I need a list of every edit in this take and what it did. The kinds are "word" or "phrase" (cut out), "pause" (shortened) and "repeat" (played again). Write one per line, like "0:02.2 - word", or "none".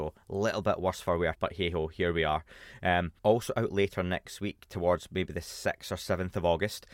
0:01.3 - word
0:03.2 - pause